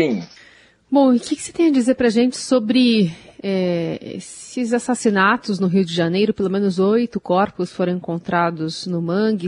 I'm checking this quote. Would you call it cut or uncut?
uncut